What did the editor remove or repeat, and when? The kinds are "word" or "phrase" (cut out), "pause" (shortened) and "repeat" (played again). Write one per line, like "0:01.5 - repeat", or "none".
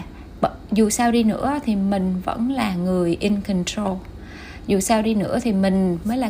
none

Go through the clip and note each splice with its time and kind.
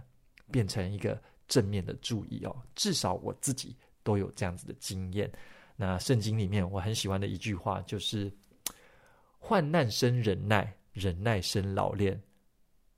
none

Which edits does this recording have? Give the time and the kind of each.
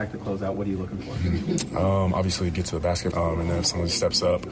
0:03.1 - word

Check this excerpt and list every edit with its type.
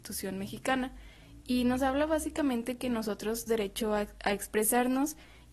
0:03.5 - word

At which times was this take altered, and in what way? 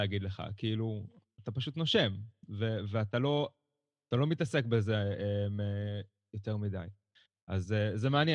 none

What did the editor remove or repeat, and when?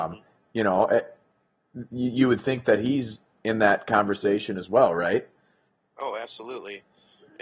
none

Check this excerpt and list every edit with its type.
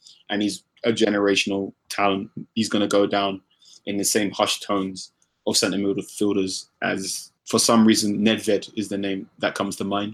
none

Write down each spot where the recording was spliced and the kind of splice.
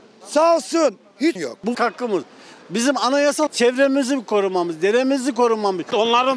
0:01.4 - word
0:01.7 - word
0:03.5 - phrase

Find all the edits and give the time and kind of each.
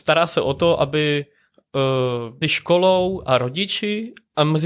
0:02.4 - word

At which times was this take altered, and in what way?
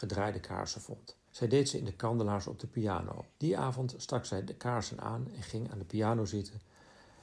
0:01.3 - pause
0:03.3 - pause

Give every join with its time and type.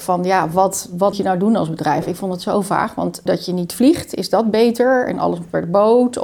0:01.1 - word
0:03.3 - phrase

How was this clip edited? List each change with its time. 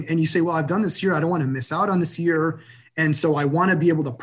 none

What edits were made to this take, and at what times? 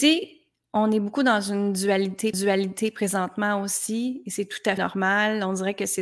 0:02.3 - repeat
0:04.8 - word

